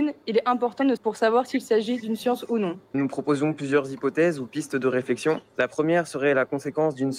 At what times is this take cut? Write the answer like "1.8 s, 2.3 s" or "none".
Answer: 1.0 s, 2.9 s, 5.5 s

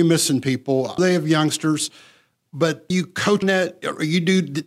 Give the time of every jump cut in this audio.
1.0 s, 2.9 s, 3.4 s

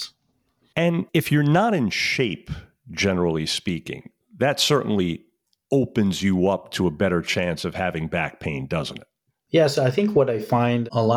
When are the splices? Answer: 1.1 s

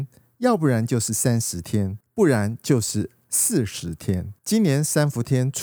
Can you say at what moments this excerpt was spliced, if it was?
2.0 s, 4.4 s

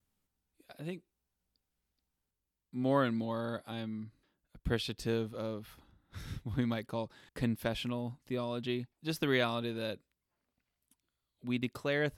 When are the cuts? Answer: 4.2 s, 7.3 s, 8.9 s

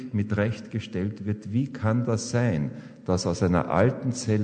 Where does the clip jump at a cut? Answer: none

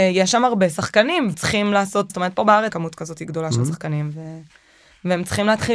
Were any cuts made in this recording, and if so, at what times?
1.3 s, 2.1 s, 2.7 s

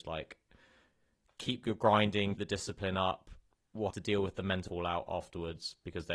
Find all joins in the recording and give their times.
2.4 s, 3.9 s, 4.7 s

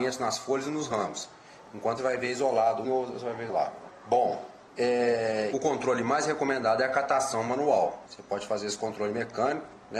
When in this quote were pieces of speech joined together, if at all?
2.0 s, 2.8 s, 3.5 s, 5.5 s

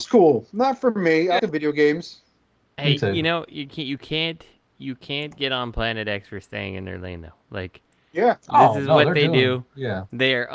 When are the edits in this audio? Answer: 1.4 s

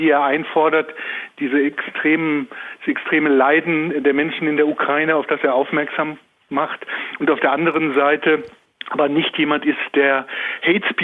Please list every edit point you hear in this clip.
none

